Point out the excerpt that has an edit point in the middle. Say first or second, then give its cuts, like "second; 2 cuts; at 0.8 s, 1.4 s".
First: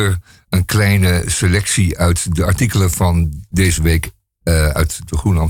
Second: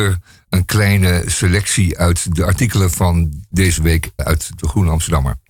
second; 1 cut; at 4.2 s